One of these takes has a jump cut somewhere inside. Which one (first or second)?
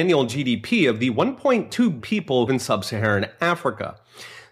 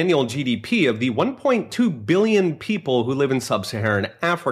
first